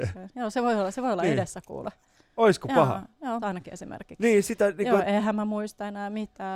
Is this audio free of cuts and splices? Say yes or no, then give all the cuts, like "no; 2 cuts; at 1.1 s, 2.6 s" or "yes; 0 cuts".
no; 1 cut; at 3.4 s